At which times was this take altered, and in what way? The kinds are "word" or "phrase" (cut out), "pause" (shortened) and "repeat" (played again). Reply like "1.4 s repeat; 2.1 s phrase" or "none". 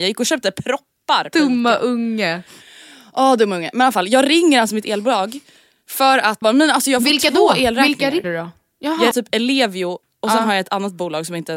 6.4 s word; 8.2 s word; 9.1 s word